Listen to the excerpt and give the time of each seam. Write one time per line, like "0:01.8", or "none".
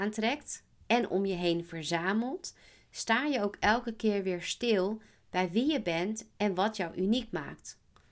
none